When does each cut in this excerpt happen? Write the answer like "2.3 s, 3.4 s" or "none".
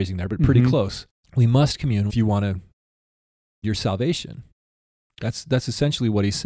1.1 s, 2.1 s, 3.6 s